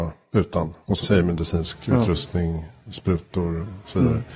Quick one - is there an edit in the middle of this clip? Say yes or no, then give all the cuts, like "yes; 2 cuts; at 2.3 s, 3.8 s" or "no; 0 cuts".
yes; 1 cut; at 1.0 s